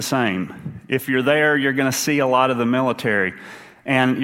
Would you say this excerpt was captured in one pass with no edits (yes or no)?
yes